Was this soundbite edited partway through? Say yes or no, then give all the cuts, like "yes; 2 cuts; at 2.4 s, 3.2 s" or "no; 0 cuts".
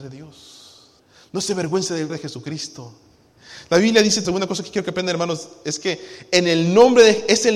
yes; 3 cuts; at 1.0 s, 2.1 s, 4.2 s